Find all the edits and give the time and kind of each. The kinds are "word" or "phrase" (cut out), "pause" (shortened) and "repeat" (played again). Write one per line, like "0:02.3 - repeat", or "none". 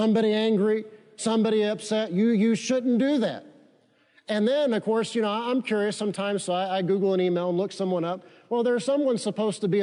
none